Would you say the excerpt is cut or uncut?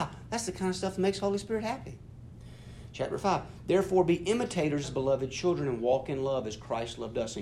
cut